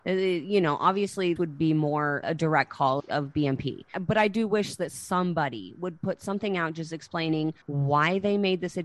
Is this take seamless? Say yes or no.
no